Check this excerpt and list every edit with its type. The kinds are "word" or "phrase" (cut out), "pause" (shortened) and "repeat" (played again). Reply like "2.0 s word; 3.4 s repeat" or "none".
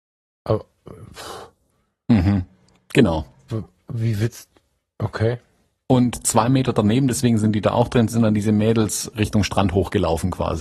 none